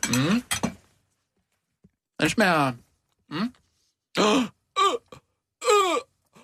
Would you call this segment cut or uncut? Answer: uncut